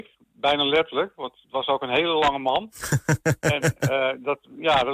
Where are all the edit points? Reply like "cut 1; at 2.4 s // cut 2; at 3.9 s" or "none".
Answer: none